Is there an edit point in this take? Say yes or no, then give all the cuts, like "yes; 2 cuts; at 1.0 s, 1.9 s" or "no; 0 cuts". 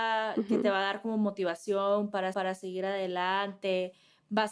yes; 1 cut; at 2.3 s